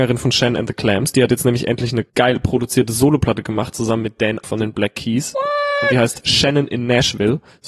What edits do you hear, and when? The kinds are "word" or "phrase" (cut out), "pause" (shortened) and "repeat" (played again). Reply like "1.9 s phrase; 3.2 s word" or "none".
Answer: 2.1 s pause; 4.4 s word